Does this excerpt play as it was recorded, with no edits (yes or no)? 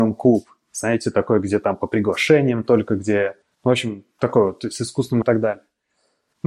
no